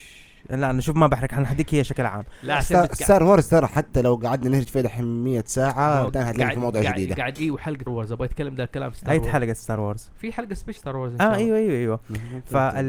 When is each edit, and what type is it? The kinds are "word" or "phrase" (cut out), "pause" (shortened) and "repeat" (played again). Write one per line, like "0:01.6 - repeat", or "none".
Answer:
0:06.1 - word
0:07.4 - word
0:07.9 - word
0:10.8 - word